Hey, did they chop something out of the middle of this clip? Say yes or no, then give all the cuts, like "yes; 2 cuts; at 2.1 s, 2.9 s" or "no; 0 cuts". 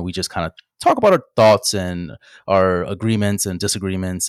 no; 0 cuts